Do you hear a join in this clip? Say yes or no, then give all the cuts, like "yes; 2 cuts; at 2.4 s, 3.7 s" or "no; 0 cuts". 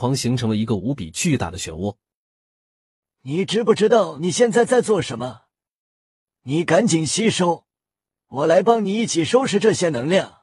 no; 0 cuts